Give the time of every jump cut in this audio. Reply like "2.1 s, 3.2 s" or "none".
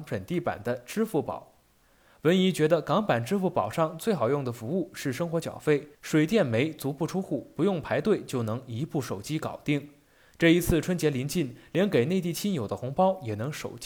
5.9 s